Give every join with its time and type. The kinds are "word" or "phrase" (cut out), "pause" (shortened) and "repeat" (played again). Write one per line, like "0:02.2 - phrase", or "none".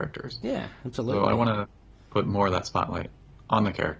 none